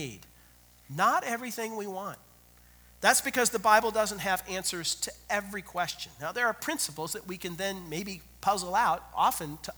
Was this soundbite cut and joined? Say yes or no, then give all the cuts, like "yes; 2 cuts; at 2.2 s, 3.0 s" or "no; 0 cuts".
no; 0 cuts